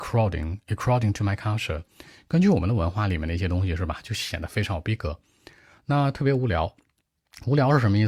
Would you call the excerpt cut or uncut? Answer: uncut